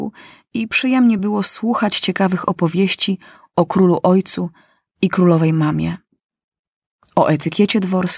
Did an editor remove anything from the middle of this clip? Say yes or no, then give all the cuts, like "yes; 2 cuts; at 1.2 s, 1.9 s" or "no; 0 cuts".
no; 0 cuts